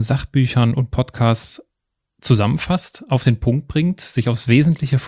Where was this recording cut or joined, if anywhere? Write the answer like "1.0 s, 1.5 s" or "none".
none

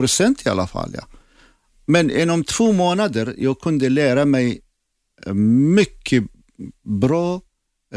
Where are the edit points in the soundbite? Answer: none

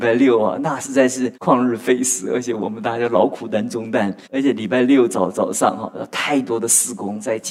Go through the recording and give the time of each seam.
1.3 s, 4.2 s

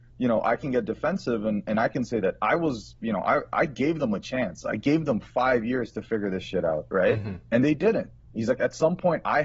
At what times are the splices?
none

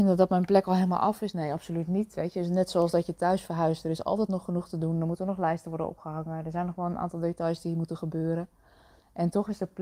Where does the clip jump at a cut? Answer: none

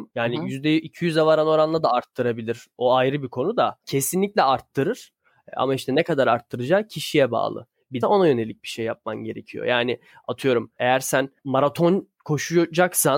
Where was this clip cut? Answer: 8.0 s

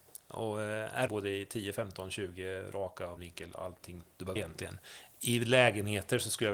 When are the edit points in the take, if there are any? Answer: 1.1 s, 3.2 s, 4.4 s

